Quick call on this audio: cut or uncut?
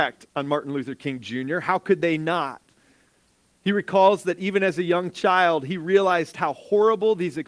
uncut